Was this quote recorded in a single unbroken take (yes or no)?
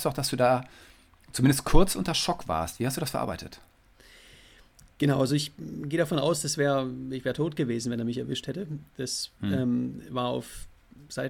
yes